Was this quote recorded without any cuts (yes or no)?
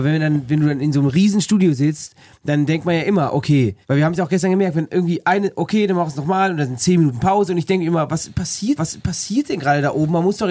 no